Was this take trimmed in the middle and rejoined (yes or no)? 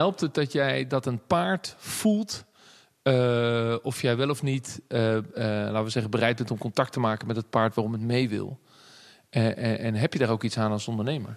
no